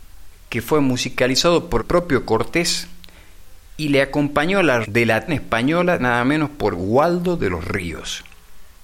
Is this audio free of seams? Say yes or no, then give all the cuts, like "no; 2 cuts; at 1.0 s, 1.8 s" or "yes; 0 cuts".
no; 4 cuts; at 1.8 s, 4.8 s, 5.3 s, 6.0 s